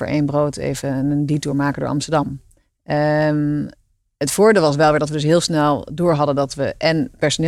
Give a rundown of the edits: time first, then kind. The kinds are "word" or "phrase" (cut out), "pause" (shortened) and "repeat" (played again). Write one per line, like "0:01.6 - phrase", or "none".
none